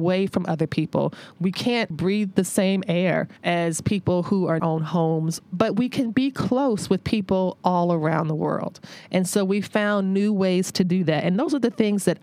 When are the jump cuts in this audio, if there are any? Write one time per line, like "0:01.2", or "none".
0:01.9
0:03.4
0:04.6